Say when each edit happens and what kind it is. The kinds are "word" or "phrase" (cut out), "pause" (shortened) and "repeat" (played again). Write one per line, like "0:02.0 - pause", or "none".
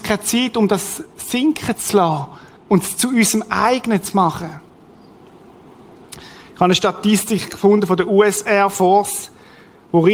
0:02.6 - pause

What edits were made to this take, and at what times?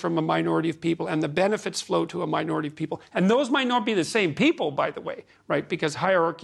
none

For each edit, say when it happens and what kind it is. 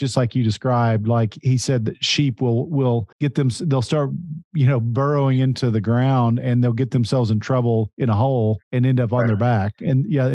0:03.1 - pause
0:08.6 - pause

